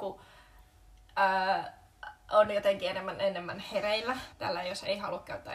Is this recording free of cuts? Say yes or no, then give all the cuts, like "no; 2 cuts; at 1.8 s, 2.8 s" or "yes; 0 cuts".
no; 1 cut; at 4.3 s